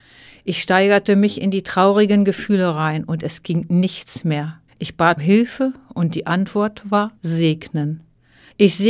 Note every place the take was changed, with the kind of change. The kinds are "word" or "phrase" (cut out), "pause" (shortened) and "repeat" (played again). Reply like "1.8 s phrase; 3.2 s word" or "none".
4.7 s pause; 5.2 s word; 7.2 s pause